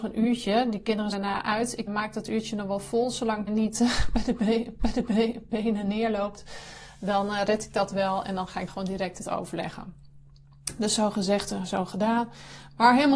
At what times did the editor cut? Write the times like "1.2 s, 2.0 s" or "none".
1.1 s, 1.9 s, 3.5 s, 4.8 s, 8.7 s, 9.2 s